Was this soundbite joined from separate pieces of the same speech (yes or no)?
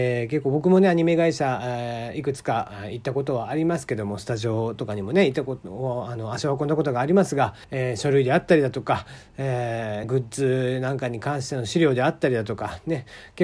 yes